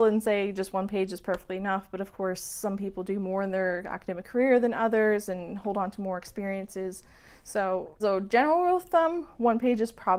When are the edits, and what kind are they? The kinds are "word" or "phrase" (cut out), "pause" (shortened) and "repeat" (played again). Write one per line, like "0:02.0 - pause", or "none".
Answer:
0:08.0 - word